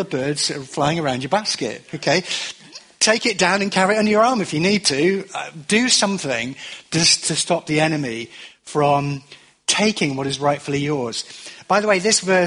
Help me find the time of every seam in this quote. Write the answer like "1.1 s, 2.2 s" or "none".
none